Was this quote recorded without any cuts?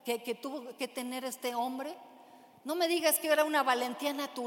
yes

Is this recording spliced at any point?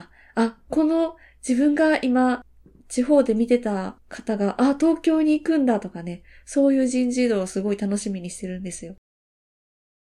no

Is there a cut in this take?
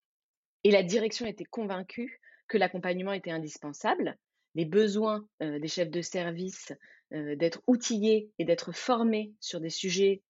yes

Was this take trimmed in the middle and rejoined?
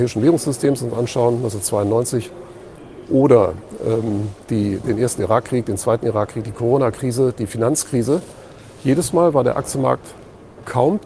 no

